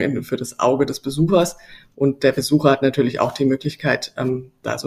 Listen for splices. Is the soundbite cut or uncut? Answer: uncut